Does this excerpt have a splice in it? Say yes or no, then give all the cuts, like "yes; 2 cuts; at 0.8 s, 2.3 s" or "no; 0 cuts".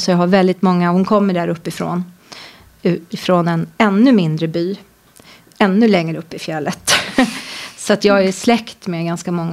no; 0 cuts